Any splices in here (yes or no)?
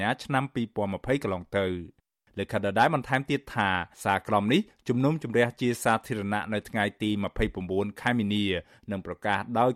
yes